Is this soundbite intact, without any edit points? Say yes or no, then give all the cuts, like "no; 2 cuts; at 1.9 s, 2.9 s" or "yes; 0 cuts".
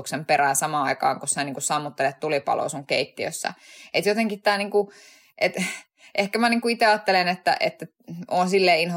yes; 0 cuts